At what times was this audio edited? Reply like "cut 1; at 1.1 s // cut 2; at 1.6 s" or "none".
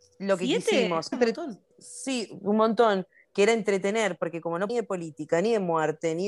cut 1; at 1.1 s // cut 2; at 1.7 s // cut 3; at 4.7 s